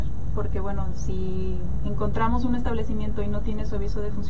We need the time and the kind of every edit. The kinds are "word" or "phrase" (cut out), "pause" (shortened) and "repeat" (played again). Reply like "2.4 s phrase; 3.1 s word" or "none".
none